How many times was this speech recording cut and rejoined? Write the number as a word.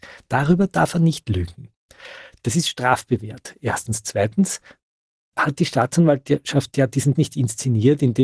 one